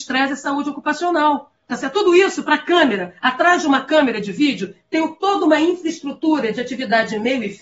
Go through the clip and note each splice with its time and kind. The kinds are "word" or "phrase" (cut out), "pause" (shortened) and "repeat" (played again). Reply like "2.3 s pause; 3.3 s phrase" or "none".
1.6 s pause